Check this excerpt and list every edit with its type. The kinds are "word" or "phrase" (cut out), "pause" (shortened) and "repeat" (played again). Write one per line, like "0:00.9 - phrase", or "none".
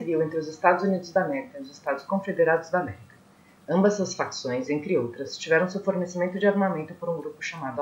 none